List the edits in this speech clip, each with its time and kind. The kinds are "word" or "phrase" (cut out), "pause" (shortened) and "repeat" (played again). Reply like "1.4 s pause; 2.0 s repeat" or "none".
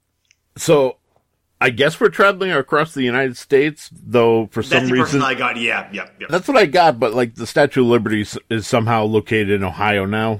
6.3 s word